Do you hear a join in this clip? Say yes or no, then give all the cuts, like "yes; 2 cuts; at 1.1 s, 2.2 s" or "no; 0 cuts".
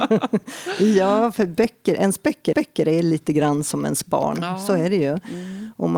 yes; 1 cut; at 2.5 s